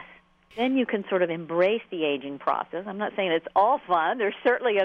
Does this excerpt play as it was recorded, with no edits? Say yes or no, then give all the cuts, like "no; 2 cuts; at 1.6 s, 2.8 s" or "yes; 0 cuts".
yes; 0 cuts